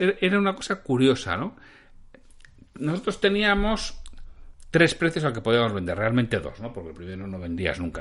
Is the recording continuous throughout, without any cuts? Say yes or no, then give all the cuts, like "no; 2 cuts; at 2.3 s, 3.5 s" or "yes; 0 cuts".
yes; 0 cuts